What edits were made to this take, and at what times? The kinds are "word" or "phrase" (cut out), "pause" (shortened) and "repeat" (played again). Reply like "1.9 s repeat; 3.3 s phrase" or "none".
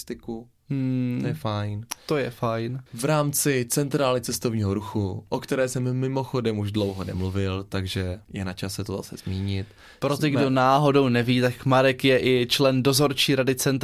2.9 s pause; 8.2 s pause